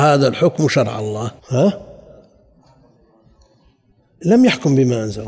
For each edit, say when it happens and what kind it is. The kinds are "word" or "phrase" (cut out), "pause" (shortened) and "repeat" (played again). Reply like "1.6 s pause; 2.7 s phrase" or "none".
1.4 s pause